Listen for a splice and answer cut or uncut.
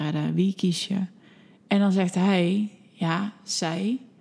cut